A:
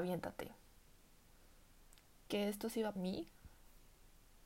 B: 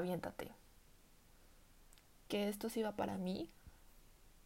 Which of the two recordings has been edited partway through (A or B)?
A